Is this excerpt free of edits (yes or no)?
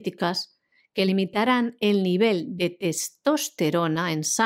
yes